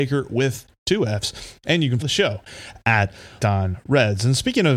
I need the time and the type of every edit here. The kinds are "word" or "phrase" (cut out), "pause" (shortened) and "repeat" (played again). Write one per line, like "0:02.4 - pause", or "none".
0:02.0 - word
0:03.4 - word